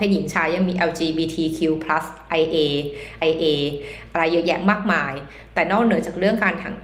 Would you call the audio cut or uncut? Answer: cut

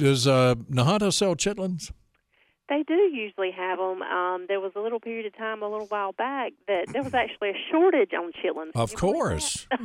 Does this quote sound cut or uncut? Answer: uncut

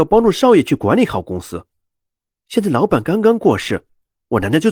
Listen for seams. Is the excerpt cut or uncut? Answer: uncut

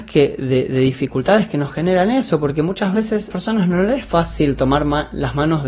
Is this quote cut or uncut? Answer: cut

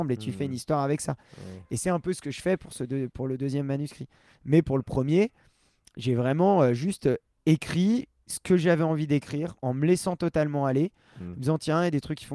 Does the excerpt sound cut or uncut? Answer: uncut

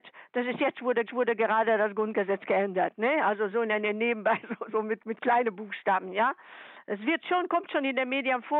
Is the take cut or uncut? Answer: cut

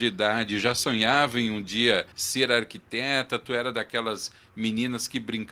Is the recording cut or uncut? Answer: cut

